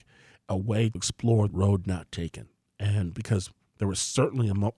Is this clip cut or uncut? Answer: cut